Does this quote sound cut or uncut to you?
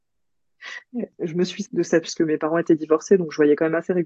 cut